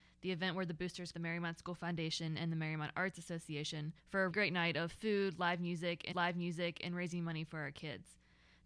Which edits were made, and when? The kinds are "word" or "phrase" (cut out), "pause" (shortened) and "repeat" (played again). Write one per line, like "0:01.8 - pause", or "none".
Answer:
0:01.1 - phrase
0:04.0 - pause
0:04.3 - word
0:06.1 - repeat